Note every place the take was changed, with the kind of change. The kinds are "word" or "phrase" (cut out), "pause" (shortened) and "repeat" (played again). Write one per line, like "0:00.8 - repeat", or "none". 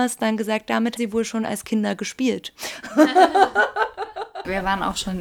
0:01.0 - word